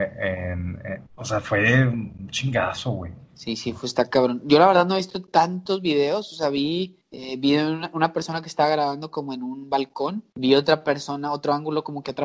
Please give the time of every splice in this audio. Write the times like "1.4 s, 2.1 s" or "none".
1.1 s, 3.3 s, 7.0 s, 10.3 s